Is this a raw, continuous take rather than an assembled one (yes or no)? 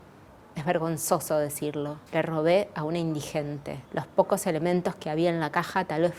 no